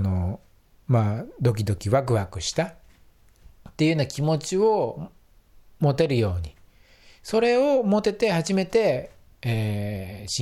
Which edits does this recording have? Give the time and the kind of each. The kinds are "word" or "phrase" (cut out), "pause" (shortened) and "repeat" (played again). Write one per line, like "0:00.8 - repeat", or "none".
none

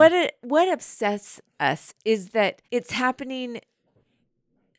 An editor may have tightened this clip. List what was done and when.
0:01.5 - pause
0:02.6 - pause

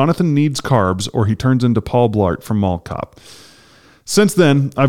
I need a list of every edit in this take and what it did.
none

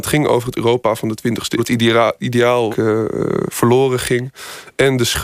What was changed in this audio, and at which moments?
0:01.6 - word
0:02.7 - phrase

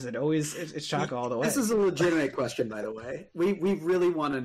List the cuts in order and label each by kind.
none

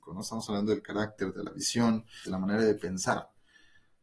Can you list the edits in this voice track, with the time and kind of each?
0:02.2 - phrase

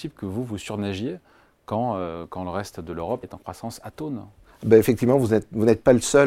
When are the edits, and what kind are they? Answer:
0:03.2 - word

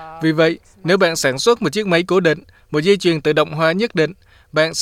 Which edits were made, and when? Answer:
none

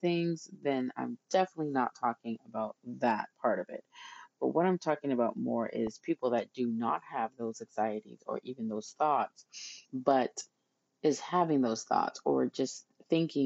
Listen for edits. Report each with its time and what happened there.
0:03.3 - pause
0:09.8 - pause

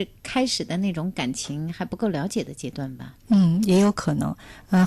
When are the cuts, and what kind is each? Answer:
0:03.2 - pause

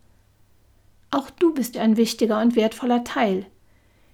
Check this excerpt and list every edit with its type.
0:01.7 - word

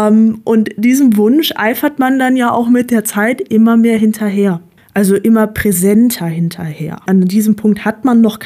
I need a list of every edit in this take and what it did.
none

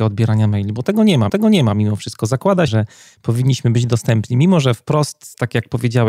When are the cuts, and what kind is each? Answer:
0:01.3 - repeat
0:02.7 - phrase

